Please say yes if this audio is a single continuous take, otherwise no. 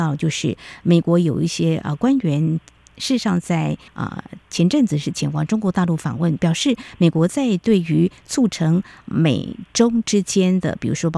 no